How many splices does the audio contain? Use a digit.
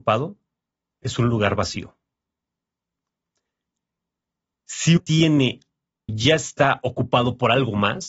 2